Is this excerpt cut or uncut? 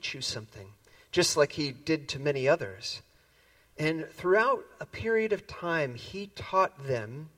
uncut